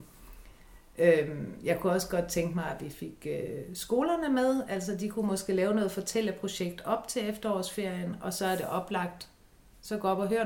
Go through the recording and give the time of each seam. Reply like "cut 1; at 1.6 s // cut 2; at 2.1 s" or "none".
none